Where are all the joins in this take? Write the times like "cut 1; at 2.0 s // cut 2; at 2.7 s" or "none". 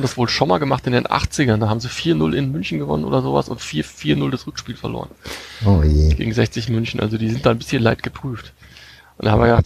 none